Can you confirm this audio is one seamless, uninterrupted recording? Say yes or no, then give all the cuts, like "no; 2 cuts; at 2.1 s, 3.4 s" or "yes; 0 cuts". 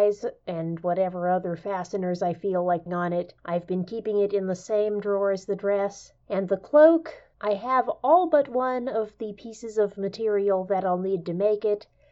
no; 4 cuts; at 2.9 s, 3.4 s, 6.2 s, 7.3 s